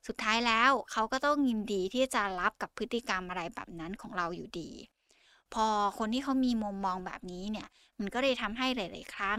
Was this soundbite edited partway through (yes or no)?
no